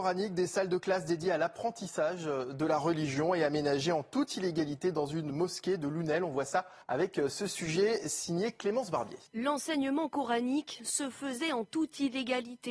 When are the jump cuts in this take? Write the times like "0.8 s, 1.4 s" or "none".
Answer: 6.8 s, 9.3 s